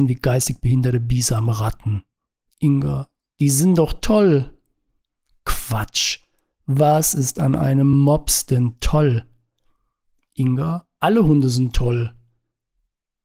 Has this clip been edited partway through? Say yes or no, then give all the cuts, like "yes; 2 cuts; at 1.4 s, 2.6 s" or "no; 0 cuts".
no; 0 cuts